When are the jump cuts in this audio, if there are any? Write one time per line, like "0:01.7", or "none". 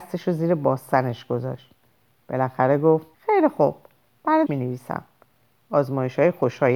0:03.1
0:04.5